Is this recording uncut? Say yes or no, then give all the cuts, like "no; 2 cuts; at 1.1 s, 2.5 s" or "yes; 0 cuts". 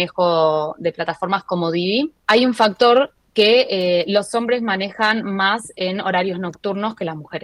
no; 1 cut; at 2.2 s